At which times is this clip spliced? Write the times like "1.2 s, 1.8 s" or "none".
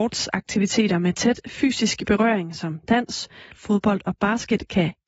3.5 s

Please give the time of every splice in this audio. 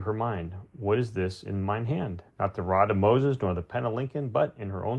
2.3 s

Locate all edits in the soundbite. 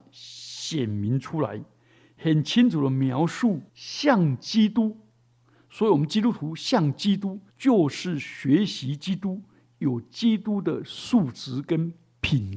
3.7 s, 7.5 s

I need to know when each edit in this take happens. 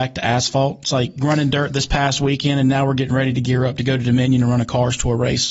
none

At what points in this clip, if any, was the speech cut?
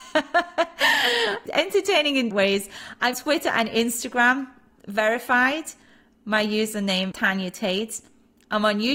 1.5 s, 2.3 s, 3.1 s, 7.1 s

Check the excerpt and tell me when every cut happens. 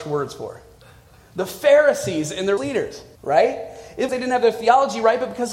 2.6 s, 3.2 s, 4.1 s

